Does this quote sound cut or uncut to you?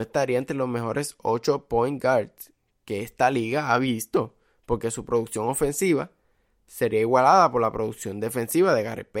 uncut